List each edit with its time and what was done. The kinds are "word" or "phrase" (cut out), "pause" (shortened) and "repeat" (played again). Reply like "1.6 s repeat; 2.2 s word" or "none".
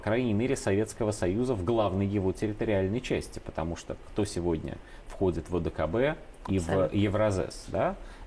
none